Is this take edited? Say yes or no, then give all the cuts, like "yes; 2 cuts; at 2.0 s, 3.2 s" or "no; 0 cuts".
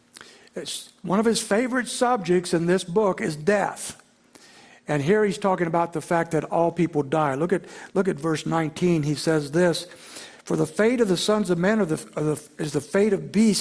no; 0 cuts